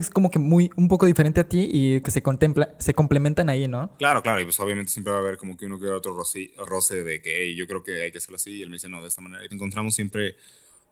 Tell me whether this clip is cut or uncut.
cut